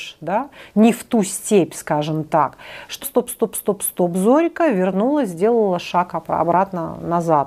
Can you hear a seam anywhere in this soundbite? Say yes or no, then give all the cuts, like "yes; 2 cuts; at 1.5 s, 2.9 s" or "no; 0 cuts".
yes; 1 cut; at 3.0 s